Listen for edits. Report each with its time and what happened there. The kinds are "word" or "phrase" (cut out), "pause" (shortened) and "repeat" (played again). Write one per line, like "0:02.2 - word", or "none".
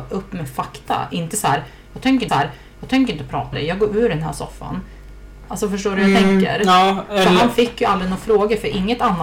0:02.3 - repeat
0:03.5 - word